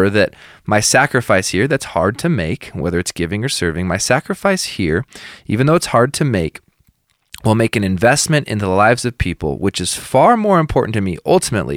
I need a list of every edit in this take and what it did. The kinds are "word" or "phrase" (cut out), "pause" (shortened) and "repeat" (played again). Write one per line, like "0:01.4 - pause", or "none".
none